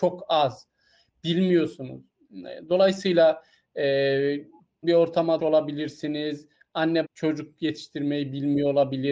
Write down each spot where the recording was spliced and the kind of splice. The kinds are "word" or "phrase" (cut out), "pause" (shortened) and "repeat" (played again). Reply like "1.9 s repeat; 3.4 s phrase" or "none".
4.8 s word; 5.4 s word; 7.0 s word